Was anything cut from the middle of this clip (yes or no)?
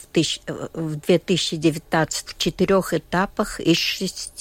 yes